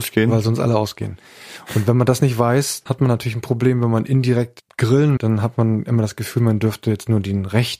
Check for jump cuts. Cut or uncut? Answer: cut